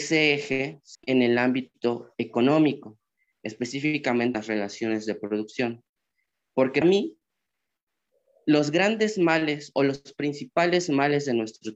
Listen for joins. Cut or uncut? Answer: cut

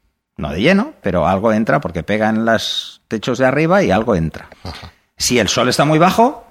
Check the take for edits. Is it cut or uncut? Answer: cut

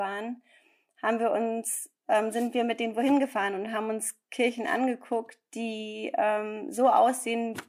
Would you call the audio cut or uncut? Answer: uncut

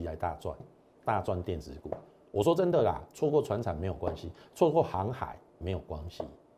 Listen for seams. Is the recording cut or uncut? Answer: uncut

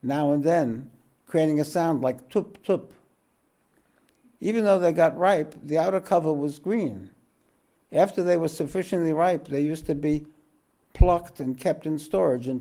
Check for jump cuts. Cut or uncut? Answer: uncut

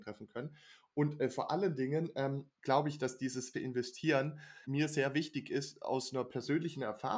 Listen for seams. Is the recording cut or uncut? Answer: cut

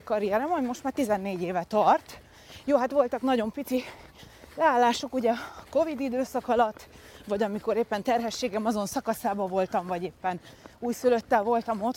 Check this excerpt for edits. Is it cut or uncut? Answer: uncut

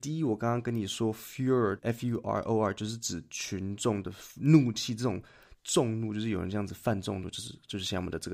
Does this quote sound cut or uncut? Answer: cut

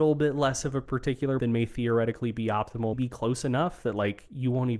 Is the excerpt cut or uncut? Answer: cut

